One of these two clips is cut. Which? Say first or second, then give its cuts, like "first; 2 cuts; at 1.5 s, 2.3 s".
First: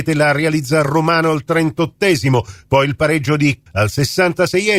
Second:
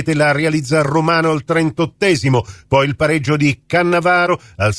first; 1 cut; at 3.7 s